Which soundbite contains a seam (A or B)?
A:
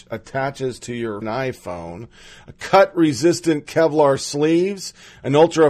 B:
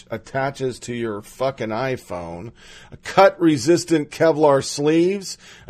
A